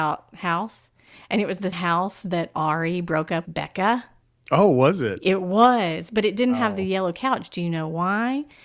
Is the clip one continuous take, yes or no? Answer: no